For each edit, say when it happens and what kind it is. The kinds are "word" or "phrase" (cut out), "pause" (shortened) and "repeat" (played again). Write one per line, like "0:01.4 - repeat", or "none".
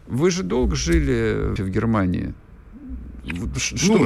0:01.6 - word